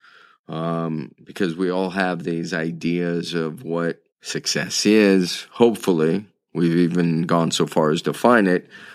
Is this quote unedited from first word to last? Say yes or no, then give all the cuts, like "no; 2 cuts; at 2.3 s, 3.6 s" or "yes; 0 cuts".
no; 1 cut; at 4.1 s